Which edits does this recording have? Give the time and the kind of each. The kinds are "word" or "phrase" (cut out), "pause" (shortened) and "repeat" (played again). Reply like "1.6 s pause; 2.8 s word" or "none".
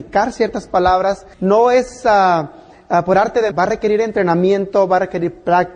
1.3 s pause; 3.5 s word